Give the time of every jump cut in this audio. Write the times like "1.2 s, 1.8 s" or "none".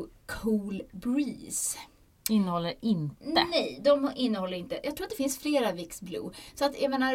none